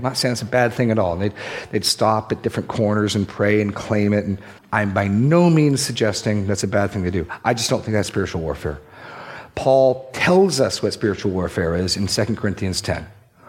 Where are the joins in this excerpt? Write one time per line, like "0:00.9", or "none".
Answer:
0:04.6